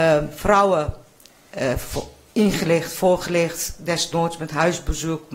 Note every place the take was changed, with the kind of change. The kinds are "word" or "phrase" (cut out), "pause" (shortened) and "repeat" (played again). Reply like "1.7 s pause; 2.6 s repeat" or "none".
none